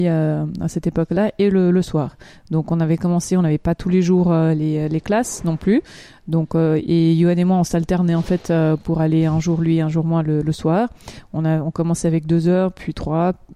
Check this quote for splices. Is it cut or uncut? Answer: uncut